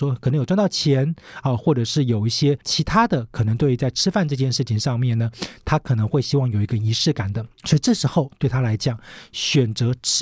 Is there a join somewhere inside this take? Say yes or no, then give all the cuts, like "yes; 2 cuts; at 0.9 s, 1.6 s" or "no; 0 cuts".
yes; 2 cuts; at 2.6 s, 7.6 s